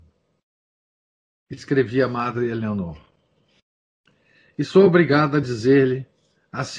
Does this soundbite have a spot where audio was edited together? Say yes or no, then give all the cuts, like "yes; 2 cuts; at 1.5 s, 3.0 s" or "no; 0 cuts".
no; 0 cuts